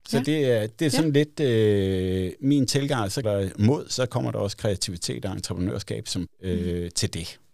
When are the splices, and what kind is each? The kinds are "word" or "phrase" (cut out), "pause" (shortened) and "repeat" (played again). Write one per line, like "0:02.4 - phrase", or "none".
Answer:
0:03.2 - word
0:06.3 - word